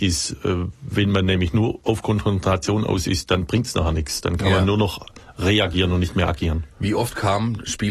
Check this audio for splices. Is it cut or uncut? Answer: uncut